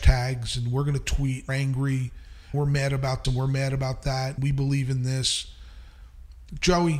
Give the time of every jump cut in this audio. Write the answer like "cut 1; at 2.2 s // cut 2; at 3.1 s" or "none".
cut 1; at 1.5 s // cut 2; at 2.5 s // cut 3; at 3.2 s // cut 4; at 4.4 s